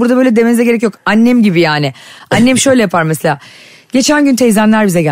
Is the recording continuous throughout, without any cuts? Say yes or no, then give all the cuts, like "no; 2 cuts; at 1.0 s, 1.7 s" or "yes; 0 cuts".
yes; 0 cuts